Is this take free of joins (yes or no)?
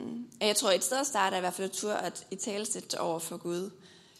yes